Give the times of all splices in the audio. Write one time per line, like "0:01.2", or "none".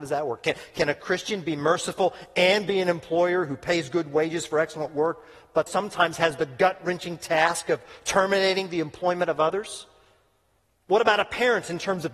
0:05.7